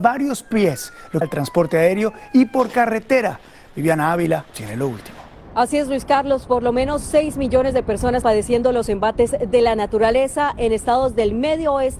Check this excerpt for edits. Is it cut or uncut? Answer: cut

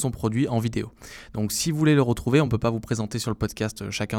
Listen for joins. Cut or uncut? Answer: uncut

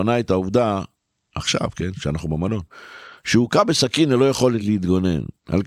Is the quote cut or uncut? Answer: uncut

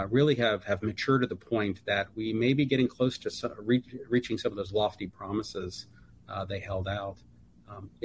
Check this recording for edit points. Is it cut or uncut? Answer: uncut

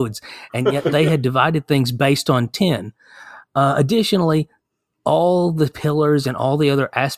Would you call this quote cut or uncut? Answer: uncut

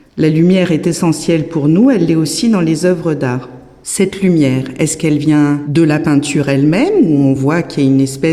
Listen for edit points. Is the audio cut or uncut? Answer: uncut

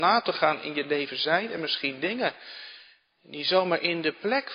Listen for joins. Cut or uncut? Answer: uncut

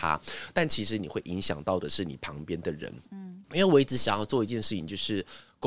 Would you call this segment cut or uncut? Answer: cut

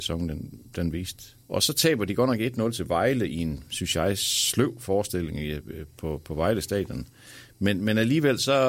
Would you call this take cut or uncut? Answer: cut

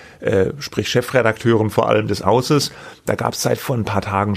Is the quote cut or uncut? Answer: cut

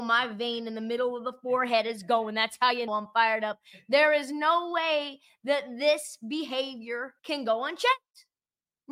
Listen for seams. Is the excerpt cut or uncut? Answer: cut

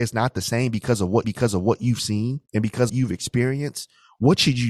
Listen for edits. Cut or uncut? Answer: cut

